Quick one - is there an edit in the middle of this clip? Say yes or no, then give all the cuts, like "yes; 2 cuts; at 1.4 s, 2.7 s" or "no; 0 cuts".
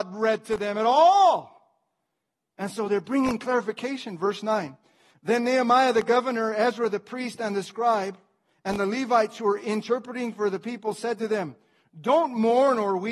no; 0 cuts